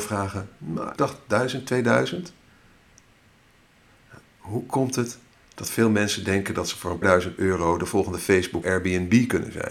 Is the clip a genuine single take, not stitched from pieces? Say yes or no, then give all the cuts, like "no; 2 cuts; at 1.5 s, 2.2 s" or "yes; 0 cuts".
no; 3 cuts; at 1.0 s, 7.0 s, 8.6 s